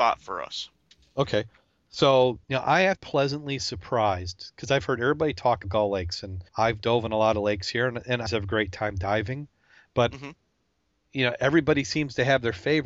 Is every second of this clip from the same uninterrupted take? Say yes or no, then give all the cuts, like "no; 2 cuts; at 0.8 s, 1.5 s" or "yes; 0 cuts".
no; 5 cuts; at 2.4 s, 3.0 s, 5.6 s, 6.5 s, 8.3 s